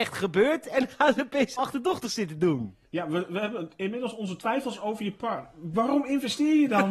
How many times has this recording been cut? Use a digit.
2